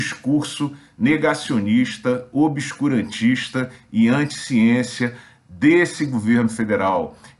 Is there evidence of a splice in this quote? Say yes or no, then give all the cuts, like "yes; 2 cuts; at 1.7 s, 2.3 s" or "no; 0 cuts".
no; 0 cuts